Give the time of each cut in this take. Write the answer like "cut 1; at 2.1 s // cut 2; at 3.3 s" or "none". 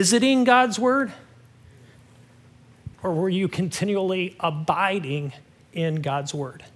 cut 1; at 2.9 s

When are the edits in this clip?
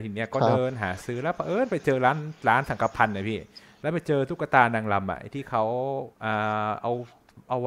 cut 1; at 6.1 s

